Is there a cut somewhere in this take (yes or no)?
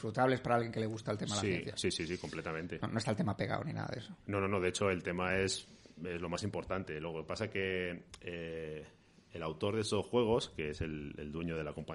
no